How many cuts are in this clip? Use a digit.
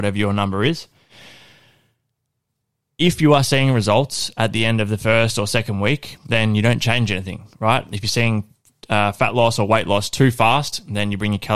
0